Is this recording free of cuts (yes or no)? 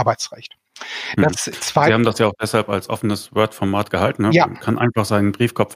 yes